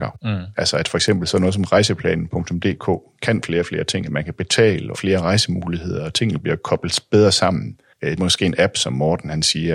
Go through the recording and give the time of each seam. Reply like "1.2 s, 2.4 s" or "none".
4.9 s, 8.2 s